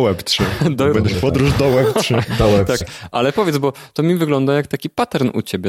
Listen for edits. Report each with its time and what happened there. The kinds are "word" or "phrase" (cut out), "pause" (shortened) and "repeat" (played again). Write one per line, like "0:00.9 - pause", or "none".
0:01.1 - word
0:02.8 - word